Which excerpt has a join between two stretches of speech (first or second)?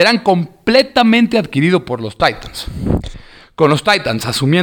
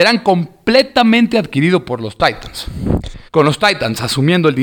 second